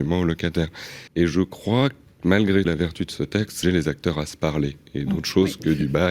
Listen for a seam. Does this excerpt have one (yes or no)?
yes